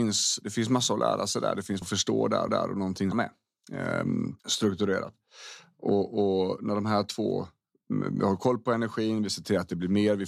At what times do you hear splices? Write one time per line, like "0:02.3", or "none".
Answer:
0:01.8
0:02.5
0:03.1
0:04.4